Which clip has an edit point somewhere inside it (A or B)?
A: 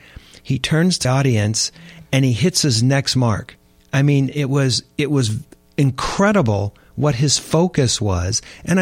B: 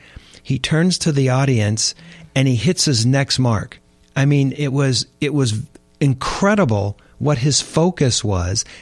A